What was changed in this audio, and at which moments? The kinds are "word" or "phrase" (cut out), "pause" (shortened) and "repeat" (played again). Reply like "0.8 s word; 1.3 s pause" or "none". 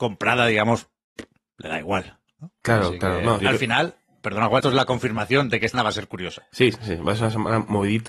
3.4 s word; 4.6 s word; 5.7 s word